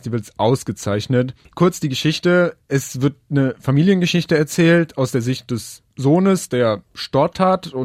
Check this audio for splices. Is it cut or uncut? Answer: cut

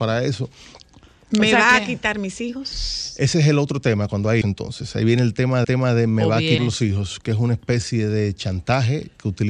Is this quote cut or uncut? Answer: cut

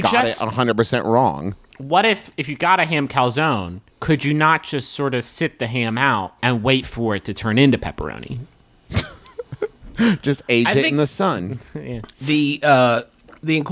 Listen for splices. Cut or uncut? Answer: cut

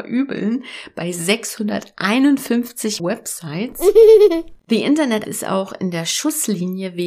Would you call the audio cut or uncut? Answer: cut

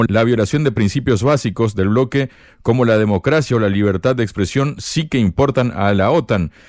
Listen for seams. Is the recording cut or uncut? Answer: uncut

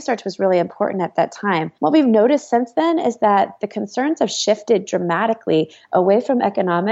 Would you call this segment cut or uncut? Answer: cut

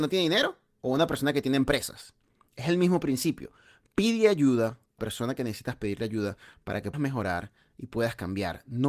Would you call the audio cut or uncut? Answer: cut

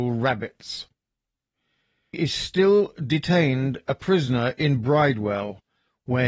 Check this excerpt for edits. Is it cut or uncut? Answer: cut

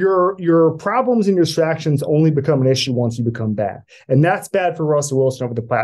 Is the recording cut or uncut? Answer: uncut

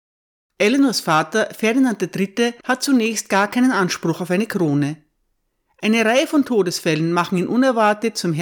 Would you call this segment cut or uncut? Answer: uncut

